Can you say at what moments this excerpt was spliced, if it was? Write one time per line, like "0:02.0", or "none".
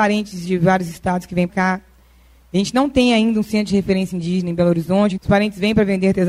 0:01.5
0:05.2